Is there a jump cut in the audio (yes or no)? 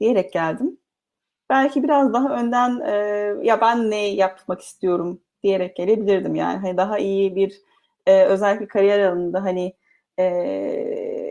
no